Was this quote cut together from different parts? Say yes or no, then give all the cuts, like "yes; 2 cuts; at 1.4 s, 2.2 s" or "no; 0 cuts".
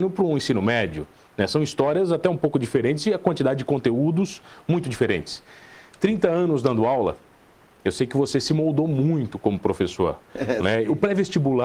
no; 0 cuts